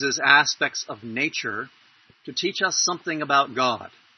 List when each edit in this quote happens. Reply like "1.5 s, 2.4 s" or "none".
none